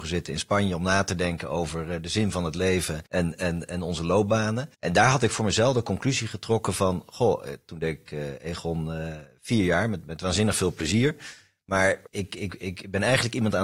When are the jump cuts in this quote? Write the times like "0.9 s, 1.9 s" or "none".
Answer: 3.1 s, 4.7 s, 12.1 s